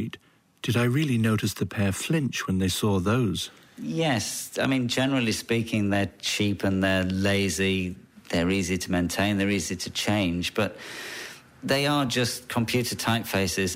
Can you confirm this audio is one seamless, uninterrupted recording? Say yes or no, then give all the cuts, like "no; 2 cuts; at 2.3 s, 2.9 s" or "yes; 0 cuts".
yes; 0 cuts